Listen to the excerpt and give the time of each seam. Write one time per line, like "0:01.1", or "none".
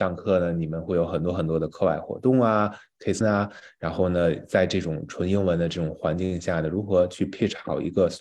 0:03.2